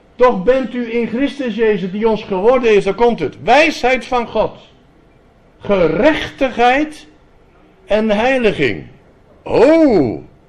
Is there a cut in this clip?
no; 0 cuts

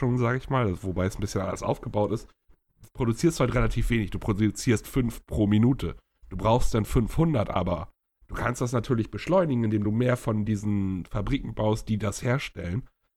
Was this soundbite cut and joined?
no; 0 cuts

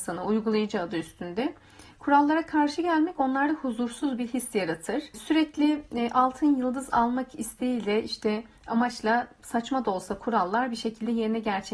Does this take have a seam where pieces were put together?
no; 0 cuts

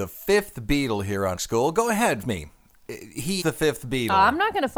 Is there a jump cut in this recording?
yes; 3 cuts; at 1.4 s, 2.2 s, 3.4 s

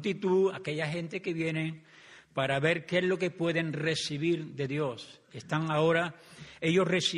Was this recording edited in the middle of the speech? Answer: no; 0 cuts

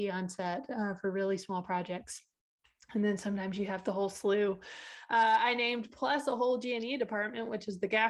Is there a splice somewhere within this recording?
no; 0 cuts

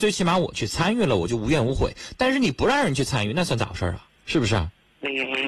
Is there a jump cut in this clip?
yes; 1 cut; at 4.2 s

